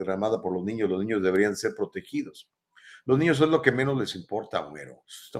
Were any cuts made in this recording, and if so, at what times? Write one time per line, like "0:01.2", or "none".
none